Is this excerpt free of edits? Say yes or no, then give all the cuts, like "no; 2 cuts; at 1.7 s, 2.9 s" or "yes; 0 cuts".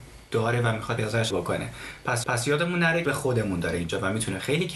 no; 4 cuts; at 1.0 s, 1.3 s, 2.2 s, 3.0 s